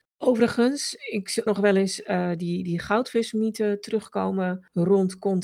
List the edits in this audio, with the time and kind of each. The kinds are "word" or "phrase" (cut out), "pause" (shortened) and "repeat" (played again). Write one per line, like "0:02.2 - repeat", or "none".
0:01.5 - phrase